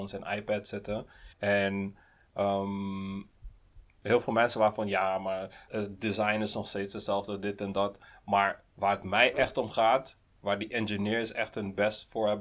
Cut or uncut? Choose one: cut